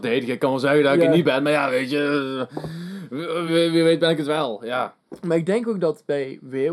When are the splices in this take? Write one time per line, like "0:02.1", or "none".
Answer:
0:03.5